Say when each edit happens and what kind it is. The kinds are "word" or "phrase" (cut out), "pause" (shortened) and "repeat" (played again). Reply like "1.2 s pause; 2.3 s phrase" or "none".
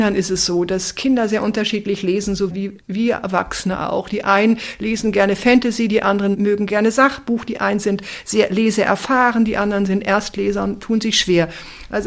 none